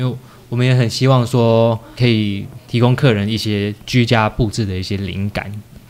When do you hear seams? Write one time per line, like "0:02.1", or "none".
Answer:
0:02.0

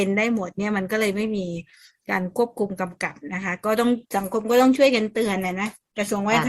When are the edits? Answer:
0:04.0

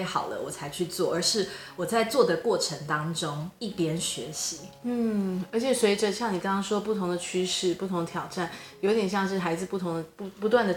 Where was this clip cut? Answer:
none

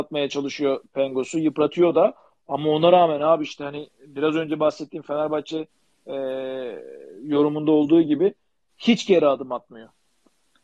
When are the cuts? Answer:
none

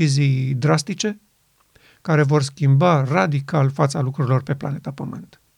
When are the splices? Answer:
none

